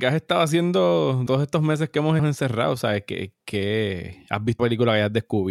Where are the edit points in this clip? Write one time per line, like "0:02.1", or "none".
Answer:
0:01.3
0:02.2
0:04.6